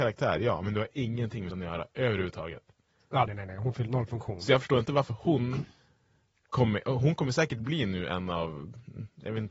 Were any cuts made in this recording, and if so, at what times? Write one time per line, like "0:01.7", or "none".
0:01.5
0:03.3
0:03.9